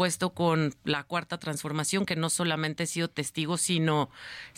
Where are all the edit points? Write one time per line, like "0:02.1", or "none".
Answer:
none